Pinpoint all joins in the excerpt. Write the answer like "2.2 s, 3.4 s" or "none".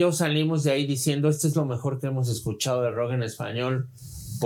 none